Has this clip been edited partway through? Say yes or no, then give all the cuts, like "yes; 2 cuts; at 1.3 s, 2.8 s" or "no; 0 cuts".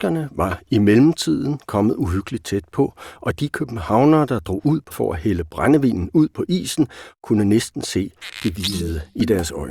yes; 1 cut; at 4.9 s